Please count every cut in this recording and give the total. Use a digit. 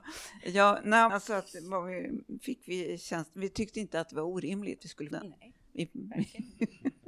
3